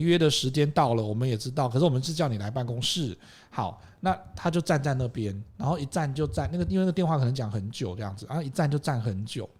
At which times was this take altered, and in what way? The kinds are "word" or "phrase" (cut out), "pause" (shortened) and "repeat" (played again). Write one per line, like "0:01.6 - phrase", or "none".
0:05.5 - word